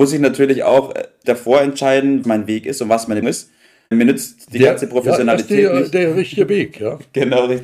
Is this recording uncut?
no; 4 cuts; at 1.2 s, 2.2 s, 3.2 s, 3.9 s

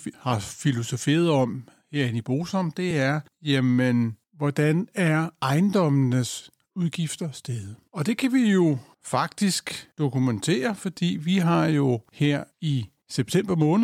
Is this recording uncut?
yes; 0 cuts

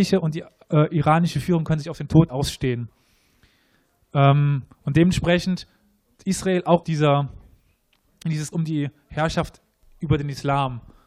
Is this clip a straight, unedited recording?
no; 4 cuts; at 2.3 s, 6.1 s, 6.8 s, 8.5 s

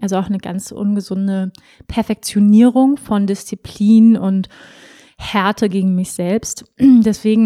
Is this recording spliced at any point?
no; 0 cuts

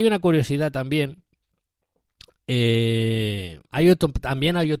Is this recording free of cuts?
no; 1 cut; at 3.7 s

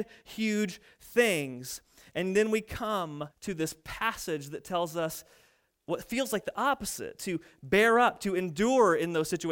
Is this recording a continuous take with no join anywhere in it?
no; 1 cut; at 3.3 s

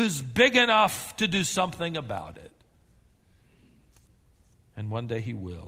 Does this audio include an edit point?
no; 0 cuts

